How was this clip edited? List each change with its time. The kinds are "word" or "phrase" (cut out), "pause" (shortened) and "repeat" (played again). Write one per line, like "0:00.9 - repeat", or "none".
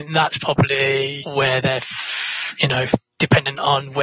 none